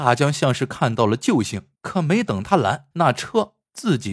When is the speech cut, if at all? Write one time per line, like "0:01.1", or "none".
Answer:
0:01.7
0:02.9